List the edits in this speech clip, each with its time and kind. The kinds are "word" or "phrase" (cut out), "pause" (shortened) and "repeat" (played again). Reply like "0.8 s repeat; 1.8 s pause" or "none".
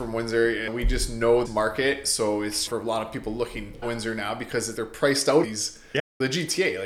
1.4 s word; 2.7 s word; 3.8 s word; 4.7 s word; 5.4 s word